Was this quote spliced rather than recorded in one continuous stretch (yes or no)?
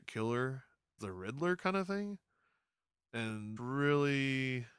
yes